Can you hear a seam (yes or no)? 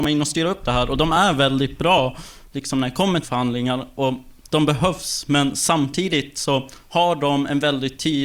yes